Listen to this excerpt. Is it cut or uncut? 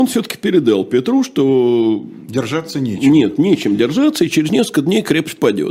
uncut